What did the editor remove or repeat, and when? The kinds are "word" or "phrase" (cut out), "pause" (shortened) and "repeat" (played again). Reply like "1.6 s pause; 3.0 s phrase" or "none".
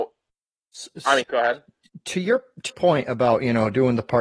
1.2 s word; 2.7 s word